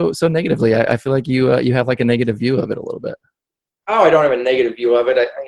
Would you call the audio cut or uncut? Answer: uncut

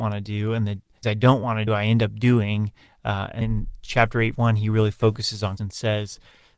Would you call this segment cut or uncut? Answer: cut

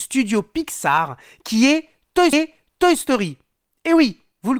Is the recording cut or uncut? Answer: cut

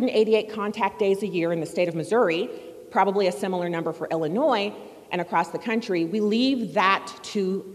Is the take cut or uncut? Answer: uncut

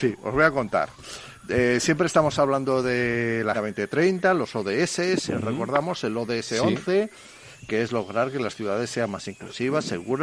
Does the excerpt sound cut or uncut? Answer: cut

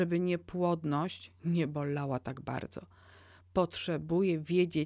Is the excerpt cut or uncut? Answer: uncut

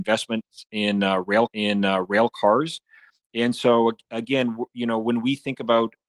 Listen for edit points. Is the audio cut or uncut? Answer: cut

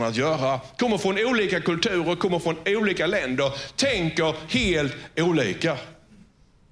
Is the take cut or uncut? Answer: uncut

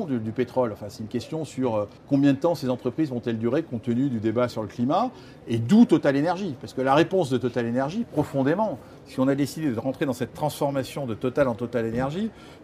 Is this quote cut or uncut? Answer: cut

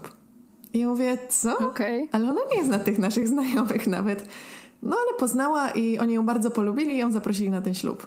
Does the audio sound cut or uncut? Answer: uncut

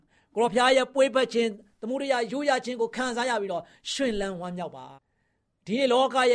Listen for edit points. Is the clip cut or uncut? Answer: cut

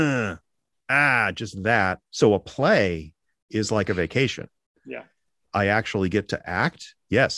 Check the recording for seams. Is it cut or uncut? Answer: cut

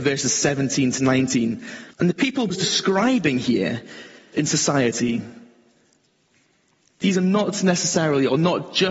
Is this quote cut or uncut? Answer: cut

